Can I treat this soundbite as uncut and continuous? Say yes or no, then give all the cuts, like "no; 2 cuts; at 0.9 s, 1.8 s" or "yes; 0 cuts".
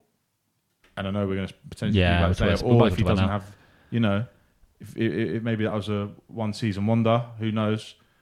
yes; 0 cuts